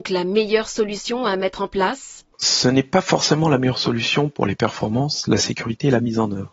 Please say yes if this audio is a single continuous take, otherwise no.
no